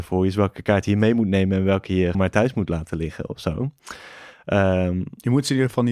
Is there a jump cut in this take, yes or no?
yes